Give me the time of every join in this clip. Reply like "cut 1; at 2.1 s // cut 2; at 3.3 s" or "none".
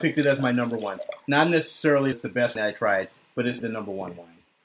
cut 1; at 2.1 s // cut 2; at 2.6 s // cut 3; at 3.6 s